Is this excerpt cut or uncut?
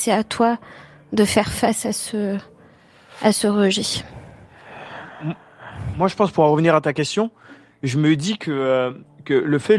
uncut